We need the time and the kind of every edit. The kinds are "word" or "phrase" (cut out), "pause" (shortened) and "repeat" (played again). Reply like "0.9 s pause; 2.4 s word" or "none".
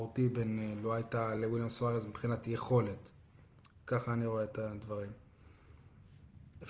none

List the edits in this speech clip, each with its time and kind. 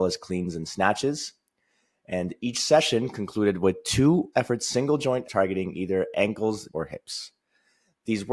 4.3 s word; 5.2 s word; 6.7 s word

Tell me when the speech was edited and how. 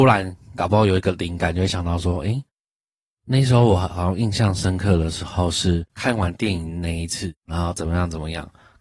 5.9 s pause; 7.4 s pause

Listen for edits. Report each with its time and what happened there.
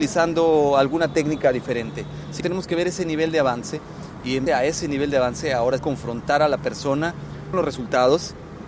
2.4 s word; 4.5 s word; 5.8 s word; 7.5 s word

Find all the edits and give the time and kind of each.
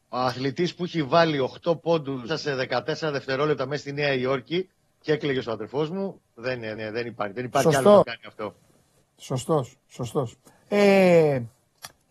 2.3 s word; 5.4 s word; 6.8 s repeat; 8.0 s word; 9.0 s pause; 10.5 s pause

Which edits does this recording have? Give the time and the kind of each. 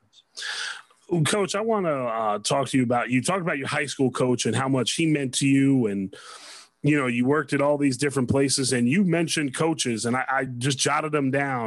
none

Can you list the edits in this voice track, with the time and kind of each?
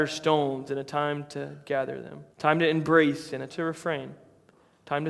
2.3 s pause; 3.5 s word

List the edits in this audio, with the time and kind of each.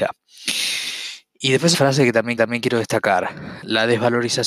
1.7 s word; 2.4 s repeat

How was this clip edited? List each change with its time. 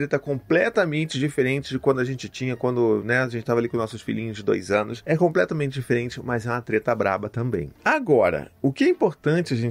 none

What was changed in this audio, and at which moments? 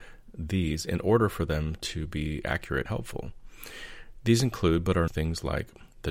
2.9 s word; 5.1 s phrase

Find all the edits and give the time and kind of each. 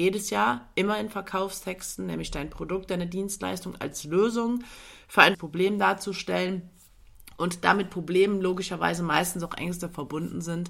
5.3 s word

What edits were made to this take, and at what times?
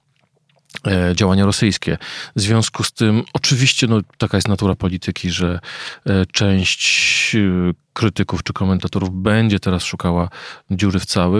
none

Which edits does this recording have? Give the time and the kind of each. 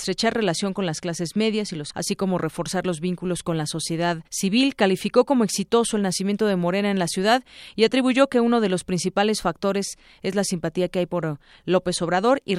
1.9 s word; 4.3 s pause

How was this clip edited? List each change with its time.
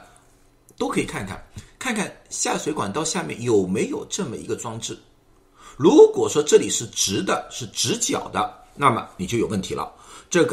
none

